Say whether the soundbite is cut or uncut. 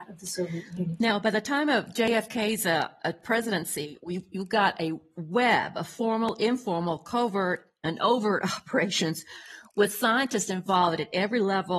uncut